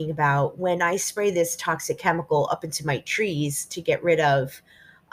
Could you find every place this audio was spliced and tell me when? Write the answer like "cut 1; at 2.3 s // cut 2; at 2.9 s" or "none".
none